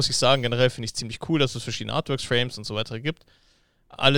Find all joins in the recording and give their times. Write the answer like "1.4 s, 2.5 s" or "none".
none